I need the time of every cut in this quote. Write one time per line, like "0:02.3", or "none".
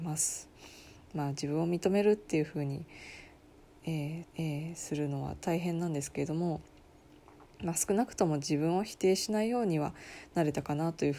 0:04.2

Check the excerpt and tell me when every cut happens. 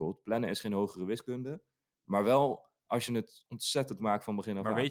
0:04.0

